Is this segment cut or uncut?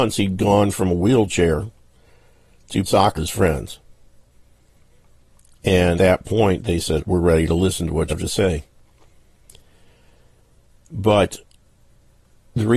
cut